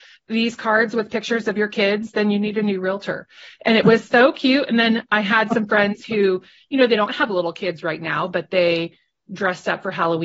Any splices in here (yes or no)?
no